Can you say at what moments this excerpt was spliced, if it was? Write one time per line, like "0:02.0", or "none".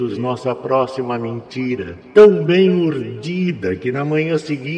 none

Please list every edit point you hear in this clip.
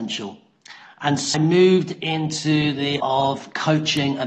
0:01.3
0:03.0

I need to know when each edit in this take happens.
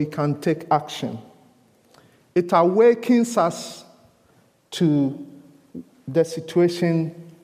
none

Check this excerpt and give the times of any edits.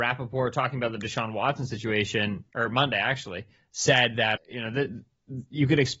0:02.5
0:04.4

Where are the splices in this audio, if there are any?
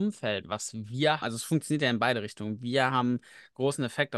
0:01.2

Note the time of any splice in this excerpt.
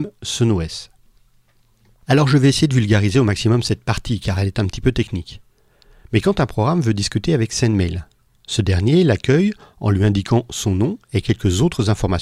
none

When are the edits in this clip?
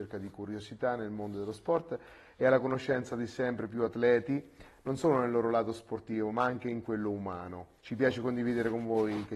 0:07.8

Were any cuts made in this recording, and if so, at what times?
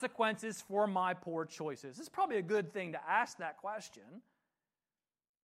none

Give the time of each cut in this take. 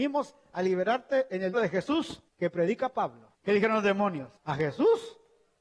0:01.5
0:02.3
0:03.3
0:04.4

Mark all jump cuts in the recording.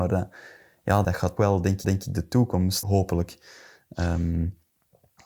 0:01.0
0:01.4
0:01.8
0:02.8

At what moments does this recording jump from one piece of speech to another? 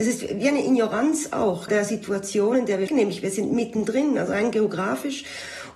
0:01.7
0:02.9

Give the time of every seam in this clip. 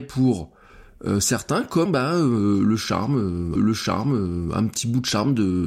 0:01.9
0:03.6

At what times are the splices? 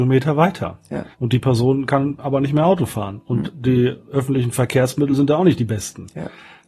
0:01.1

